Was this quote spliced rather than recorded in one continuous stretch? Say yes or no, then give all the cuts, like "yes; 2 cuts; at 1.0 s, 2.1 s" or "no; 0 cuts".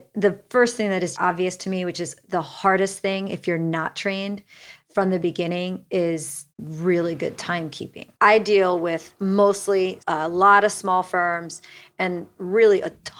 yes; 4 cuts; at 1.1 s, 6.5 s, 8.1 s, 10.0 s